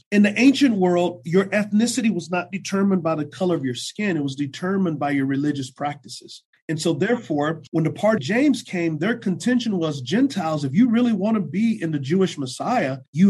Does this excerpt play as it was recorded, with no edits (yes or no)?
no